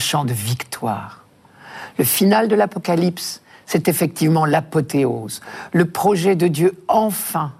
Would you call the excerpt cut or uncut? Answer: uncut